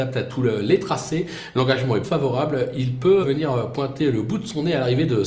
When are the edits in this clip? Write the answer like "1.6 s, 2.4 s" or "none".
2.0 s, 3.2 s